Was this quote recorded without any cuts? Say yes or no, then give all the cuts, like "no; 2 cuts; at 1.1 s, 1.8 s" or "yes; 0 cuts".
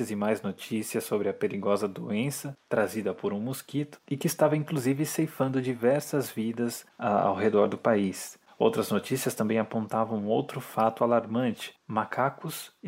yes; 0 cuts